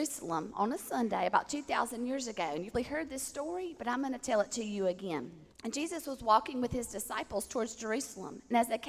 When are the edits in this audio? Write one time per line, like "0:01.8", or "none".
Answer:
0:02.7
0:05.5